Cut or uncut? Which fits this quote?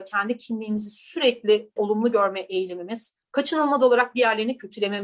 cut